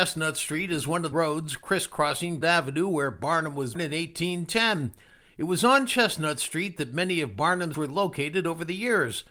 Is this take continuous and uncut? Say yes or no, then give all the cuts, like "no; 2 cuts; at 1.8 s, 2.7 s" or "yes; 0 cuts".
no; 4 cuts; at 1.1 s, 2.4 s, 3.7 s, 7.7 s